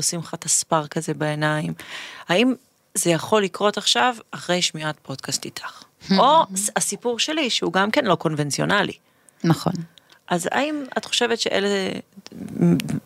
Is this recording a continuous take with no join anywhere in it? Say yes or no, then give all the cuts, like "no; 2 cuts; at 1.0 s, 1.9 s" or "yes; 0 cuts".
yes; 0 cuts